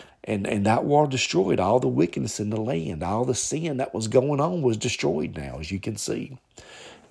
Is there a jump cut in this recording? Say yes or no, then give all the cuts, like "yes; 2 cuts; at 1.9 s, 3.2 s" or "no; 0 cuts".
no; 0 cuts